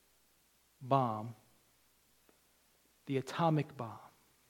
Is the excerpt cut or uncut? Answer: uncut